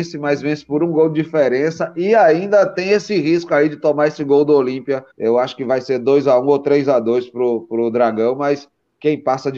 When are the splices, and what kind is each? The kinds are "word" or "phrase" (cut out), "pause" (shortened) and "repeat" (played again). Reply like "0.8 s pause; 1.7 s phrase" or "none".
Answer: 5.1 s pause